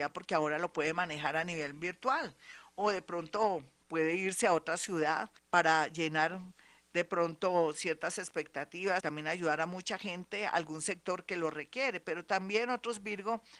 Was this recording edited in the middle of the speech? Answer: yes; 2 cuts; at 5.4 s, 9.0 s

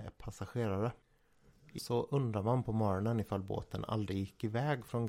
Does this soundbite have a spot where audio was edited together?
yes; 1 cut; at 1.8 s

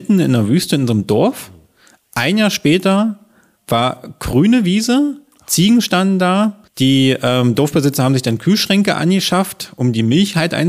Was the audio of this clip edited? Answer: yes; 1 cut; at 6.7 s

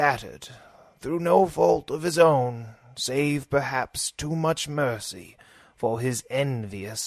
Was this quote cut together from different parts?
no; 0 cuts

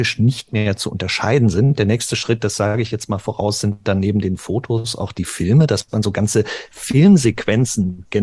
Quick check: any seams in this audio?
no; 0 cuts

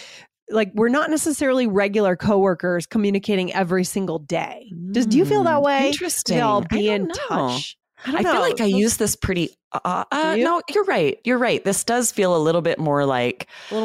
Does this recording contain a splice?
no; 0 cuts

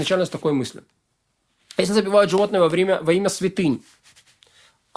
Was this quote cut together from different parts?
no; 0 cuts

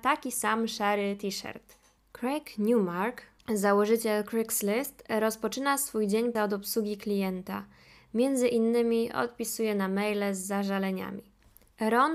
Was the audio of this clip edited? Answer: yes; 1 cut; at 6.3 s

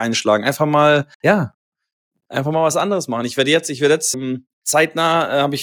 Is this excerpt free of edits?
no; 3 cuts; at 1.1 s, 4.1 s, 4.5 s

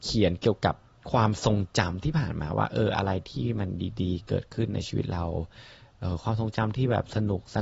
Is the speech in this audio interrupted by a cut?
no; 0 cuts

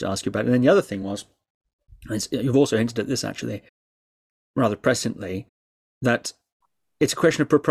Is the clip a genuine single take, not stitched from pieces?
yes; 0 cuts

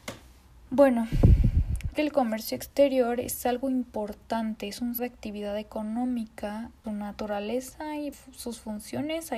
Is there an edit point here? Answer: yes; 4 cuts; at 1.9 s, 5.0 s, 6.8 s, 8.1 s

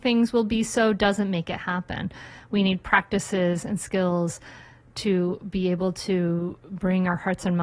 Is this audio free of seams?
yes; 0 cuts

